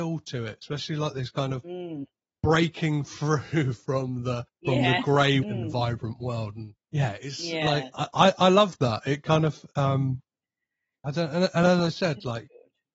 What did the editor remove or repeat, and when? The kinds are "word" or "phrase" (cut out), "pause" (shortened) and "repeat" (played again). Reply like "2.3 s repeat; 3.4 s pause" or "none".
4.5 s pause; 5.4 s phrase; 6.8 s pause; 8.1 s word